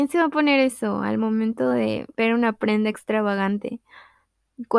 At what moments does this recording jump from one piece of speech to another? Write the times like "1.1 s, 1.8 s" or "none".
2.1 s